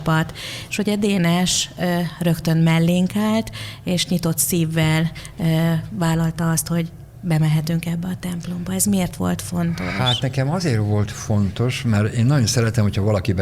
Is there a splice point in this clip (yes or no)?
no